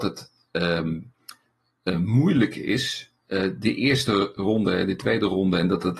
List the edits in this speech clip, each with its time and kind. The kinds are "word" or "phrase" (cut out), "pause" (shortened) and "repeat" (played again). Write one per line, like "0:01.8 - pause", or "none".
none